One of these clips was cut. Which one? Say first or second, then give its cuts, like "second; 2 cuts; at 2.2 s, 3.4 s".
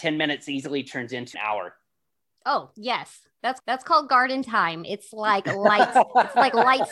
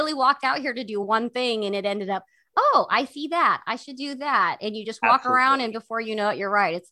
first; 2 cuts; at 1.3 s, 3.6 s